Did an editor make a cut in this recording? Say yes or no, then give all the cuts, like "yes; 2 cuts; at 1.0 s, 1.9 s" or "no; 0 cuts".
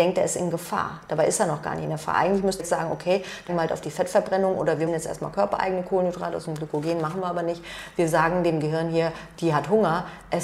yes; 4 cuts; at 2.6 s, 3.5 s, 4.6 s, 4.9 s